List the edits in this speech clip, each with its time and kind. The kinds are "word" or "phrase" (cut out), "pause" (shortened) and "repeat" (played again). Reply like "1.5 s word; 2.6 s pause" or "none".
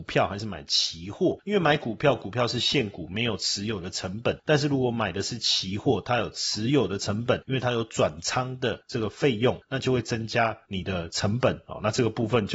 none